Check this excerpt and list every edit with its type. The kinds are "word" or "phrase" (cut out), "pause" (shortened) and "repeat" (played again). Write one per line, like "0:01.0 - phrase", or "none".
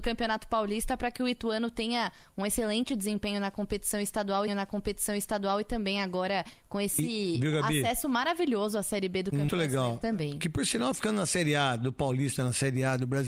0:04.5 - repeat
0:09.5 - word